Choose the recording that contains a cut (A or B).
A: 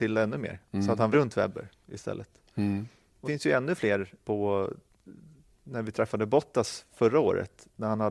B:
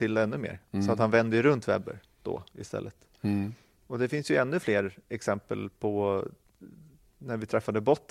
A